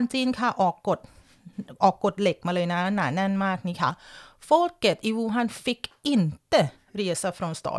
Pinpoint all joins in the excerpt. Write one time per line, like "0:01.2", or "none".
none